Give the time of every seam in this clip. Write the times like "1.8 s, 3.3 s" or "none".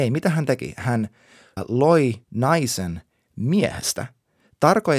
1.6 s, 2.2 s